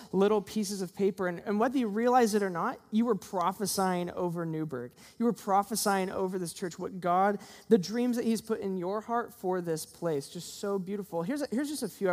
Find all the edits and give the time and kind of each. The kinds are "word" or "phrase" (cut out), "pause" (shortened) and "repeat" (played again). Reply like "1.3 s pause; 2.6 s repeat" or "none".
none